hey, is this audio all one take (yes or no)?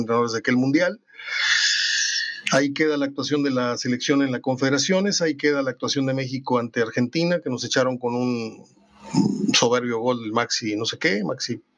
yes